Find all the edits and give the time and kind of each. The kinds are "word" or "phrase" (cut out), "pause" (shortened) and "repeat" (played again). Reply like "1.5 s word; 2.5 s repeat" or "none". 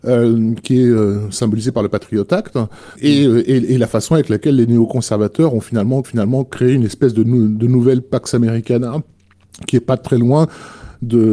2.9 s word; 6.0 s repeat